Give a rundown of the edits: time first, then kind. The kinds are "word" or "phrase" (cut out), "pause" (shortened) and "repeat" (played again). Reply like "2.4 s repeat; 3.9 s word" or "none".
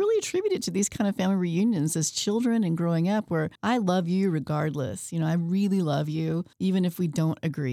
3.6 s pause; 6.5 s pause